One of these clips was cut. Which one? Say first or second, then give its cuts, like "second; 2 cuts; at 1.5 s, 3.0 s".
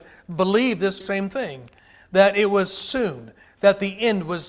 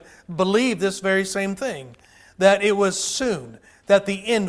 first; 1 cut; at 1.0 s